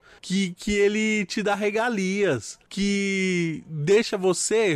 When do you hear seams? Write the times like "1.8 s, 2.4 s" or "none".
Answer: none